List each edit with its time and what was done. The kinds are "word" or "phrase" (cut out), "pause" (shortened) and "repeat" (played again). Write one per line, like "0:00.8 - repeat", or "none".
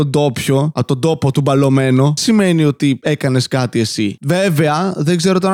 0:02.2 - word